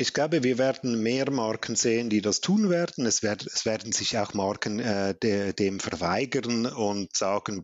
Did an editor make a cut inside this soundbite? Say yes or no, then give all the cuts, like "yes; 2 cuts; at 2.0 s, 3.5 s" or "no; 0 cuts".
no; 0 cuts